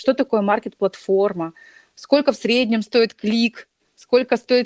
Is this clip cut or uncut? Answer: uncut